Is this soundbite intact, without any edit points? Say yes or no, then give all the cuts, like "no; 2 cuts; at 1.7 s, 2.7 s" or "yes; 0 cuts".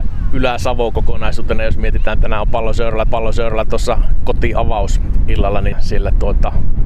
no; 3 cuts; at 2.2 s, 3.0 s, 5.7 s